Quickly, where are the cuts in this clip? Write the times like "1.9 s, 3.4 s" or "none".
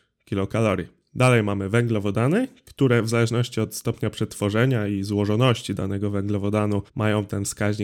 6.9 s